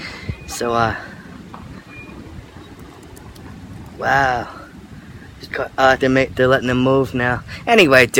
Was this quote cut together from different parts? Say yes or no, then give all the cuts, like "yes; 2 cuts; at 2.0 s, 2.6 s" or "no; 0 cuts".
yes; 2 cuts; at 5.5 s, 6.0 s